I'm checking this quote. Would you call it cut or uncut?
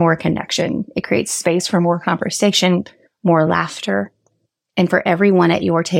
uncut